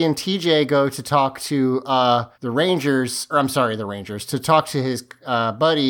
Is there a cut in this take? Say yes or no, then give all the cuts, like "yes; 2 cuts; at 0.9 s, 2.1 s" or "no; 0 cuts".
yes; 2 cuts; at 2.3 s, 3.3 s